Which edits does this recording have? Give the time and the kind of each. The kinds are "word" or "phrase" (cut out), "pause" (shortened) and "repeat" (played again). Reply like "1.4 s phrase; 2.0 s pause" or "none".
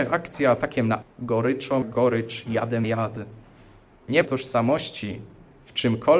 1.0 s word; 1.8 s word; 2.8 s word; 4.2 s word